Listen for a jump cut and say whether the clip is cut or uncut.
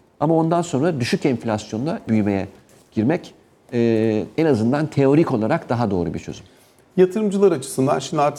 cut